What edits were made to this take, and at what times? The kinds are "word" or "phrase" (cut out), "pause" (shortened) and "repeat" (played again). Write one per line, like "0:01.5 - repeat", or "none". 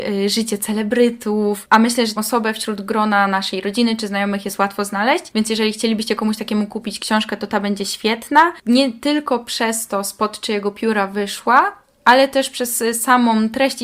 0:02.2 - word